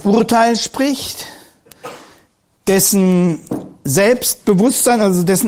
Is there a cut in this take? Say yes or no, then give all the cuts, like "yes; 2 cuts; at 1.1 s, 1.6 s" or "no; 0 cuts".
no; 0 cuts